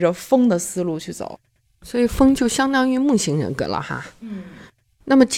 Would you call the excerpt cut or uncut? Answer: uncut